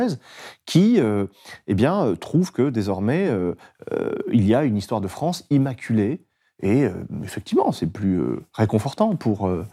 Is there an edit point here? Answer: no; 0 cuts

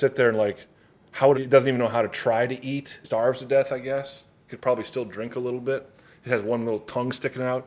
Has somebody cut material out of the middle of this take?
yes; 2 cuts; at 1.3 s, 3.0 s

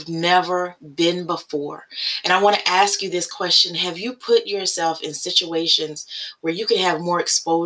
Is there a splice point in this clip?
no; 0 cuts

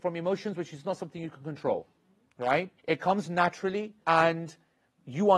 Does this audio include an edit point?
yes; 2 cuts; at 2.8 s, 4.0 s

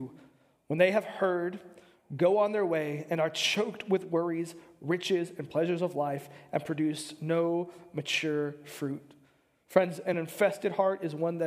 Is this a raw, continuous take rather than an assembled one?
yes; 0 cuts

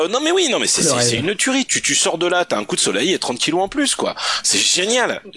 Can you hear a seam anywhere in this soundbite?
no; 0 cuts

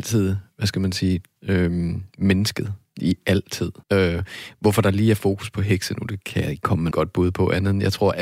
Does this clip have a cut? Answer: yes; 3 cuts; at 1.4 s, 3.8 s, 6.9 s

